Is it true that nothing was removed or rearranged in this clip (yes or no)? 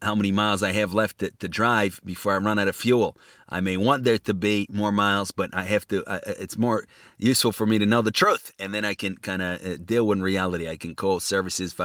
yes